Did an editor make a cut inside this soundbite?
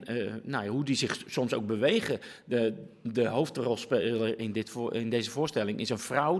no; 0 cuts

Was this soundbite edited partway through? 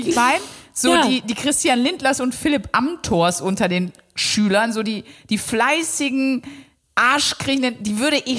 no; 0 cuts

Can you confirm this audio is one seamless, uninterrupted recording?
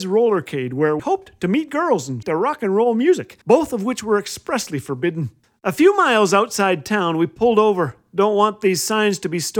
no; 4 cuts; at 1.0 s, 2.2 s, 3.4 s, 5.4 s

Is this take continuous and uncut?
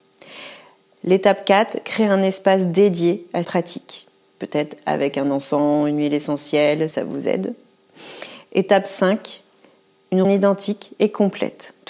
no; 3 cuts; at 3.4 s, 6.9 s, 10.2 s

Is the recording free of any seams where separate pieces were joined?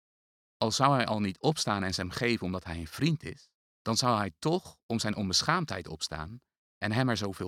no; 1 cut; at 3.6 s

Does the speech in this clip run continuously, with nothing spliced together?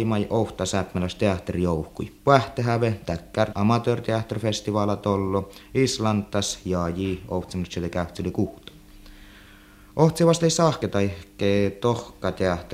no; 3 cuts; at 2.2 s, 3.5 s, 10.8 s

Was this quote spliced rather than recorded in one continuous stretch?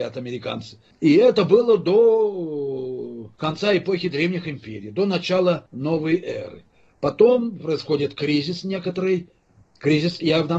no; 0 cuts

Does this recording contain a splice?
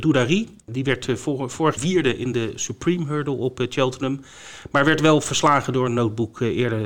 yes; 1 cut; at 1.8 s

